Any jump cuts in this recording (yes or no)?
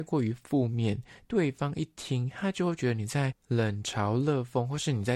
yes